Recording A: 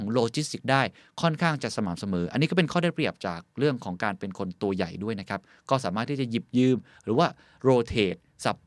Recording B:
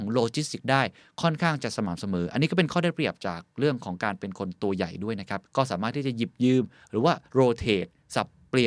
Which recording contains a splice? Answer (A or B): B